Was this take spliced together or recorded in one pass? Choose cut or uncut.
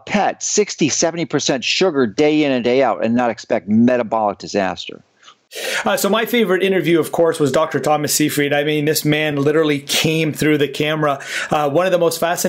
uncut